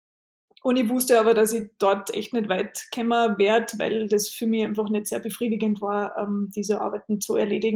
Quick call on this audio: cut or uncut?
uncut